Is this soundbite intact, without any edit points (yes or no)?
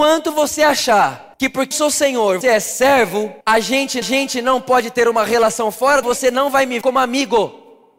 no